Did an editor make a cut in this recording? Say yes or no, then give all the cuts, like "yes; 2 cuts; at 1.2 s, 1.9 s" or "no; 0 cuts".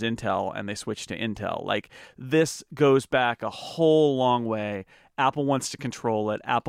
no; 0 cuts